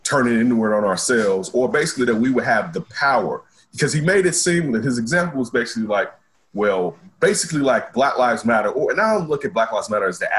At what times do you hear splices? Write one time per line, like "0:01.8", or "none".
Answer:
none